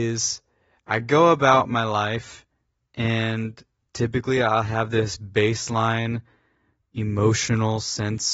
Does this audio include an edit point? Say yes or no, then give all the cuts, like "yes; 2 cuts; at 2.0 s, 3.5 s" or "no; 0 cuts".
no; 0 cuts